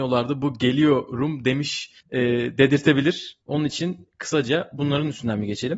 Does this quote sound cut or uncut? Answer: cut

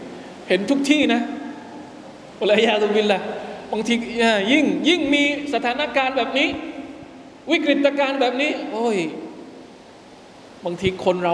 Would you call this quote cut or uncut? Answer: uncut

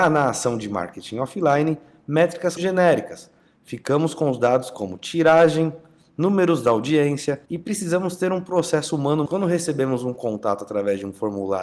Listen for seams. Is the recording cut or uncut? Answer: cut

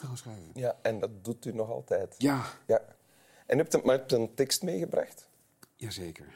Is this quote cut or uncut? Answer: uncut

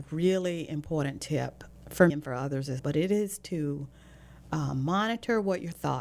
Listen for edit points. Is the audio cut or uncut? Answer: cut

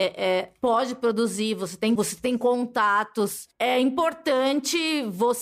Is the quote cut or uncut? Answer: cut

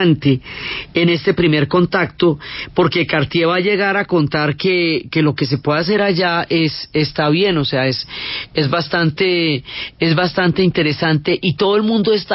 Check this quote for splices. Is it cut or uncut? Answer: uncut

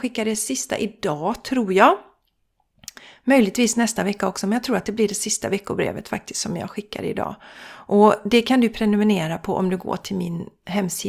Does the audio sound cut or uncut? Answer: uncut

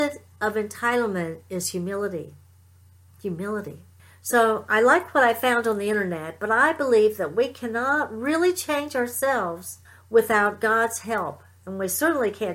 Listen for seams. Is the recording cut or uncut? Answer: cut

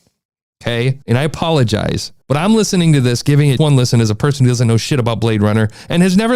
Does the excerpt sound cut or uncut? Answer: cut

